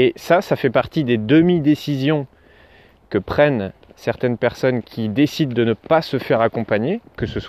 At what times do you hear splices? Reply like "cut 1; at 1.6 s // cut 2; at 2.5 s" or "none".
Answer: none